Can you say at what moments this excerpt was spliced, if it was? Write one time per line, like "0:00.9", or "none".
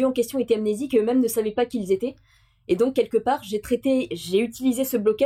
none